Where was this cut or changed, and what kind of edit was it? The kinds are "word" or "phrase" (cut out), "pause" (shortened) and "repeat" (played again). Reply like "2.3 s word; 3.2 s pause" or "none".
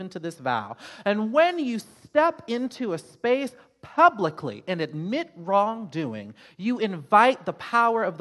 none